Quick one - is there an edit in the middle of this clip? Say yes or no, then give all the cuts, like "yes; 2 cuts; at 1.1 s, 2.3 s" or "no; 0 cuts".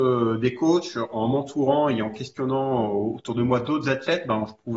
no; 0 cuts